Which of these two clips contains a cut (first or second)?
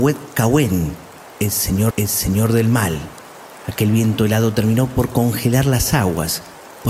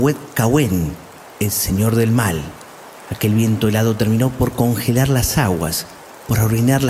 first